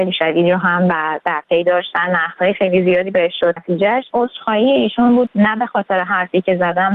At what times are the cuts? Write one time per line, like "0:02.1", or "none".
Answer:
0:03.6